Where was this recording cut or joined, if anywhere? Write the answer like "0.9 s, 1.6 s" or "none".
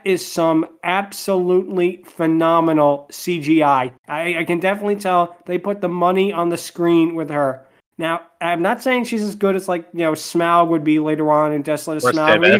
4.0 s